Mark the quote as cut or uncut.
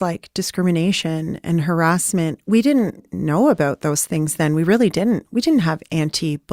uncut